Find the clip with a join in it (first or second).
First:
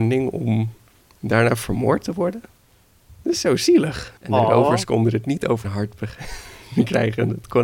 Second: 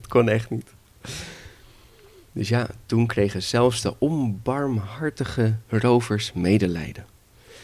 first